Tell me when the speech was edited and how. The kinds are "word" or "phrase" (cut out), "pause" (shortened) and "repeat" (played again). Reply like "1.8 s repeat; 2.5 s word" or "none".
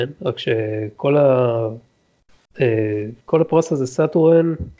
3.2 s pause

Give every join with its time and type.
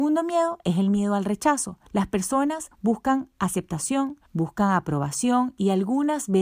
1.9 s pause; 2.7 s pause; 4.3 s pause

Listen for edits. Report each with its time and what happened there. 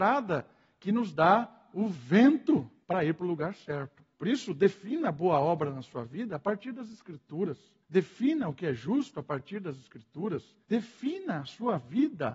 2.8 s pause; 4.1 s pause; 7.8 s pause; 10.6 s pause

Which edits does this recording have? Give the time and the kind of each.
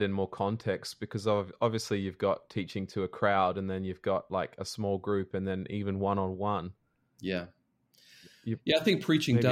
none

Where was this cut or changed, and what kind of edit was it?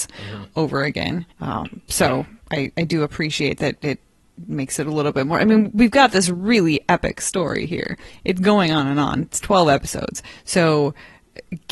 1.3 s pause; 2.4 s pause

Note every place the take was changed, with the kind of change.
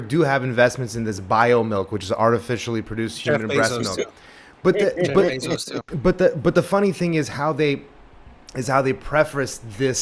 none

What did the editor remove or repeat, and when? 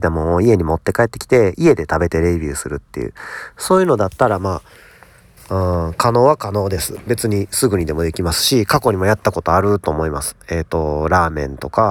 none

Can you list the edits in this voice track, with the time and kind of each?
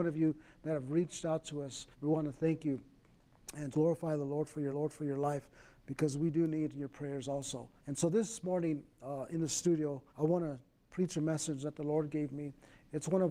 1.9 s pause; 3.7 s word; 4.7 s repeat; 7.8 s pause; 10.1 s pause

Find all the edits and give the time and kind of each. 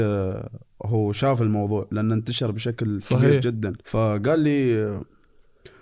3.8 s pause

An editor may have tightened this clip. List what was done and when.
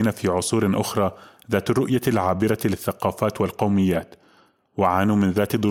none

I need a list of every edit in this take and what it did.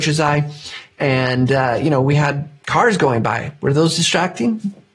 none

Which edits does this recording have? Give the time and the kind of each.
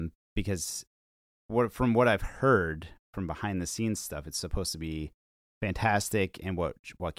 none

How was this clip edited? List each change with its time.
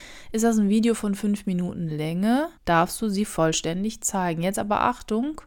2.6 s pause

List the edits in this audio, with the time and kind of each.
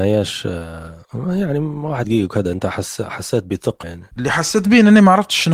1.0 s pause; 2.0 s phrase; 3.8 s word

